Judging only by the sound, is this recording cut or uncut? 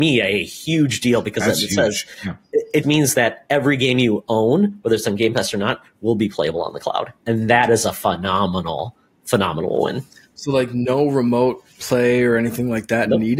cut